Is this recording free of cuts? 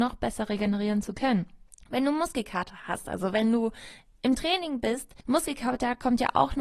no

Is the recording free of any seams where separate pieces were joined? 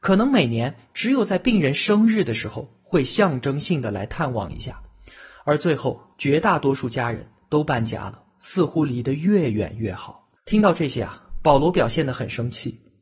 no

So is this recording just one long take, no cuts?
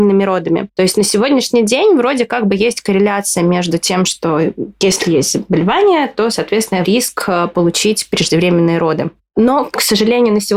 no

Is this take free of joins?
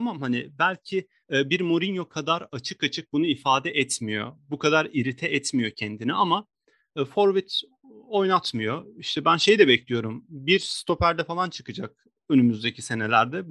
yes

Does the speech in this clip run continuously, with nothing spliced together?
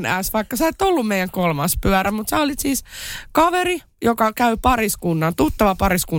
yes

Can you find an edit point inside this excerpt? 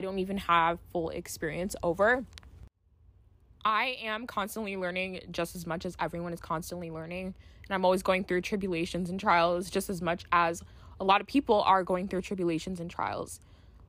no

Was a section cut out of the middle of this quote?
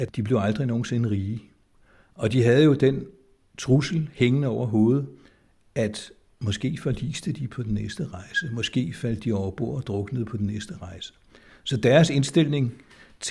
no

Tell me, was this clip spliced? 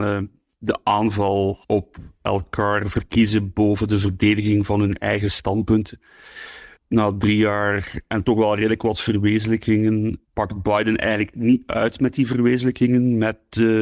yes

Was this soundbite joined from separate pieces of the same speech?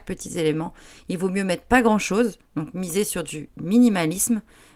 no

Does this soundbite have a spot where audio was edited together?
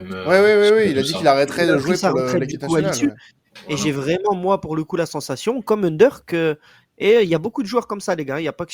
no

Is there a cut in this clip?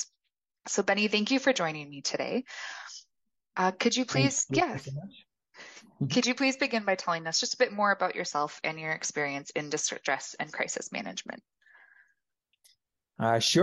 no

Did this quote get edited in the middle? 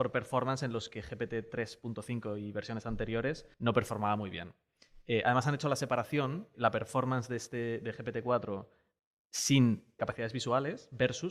yes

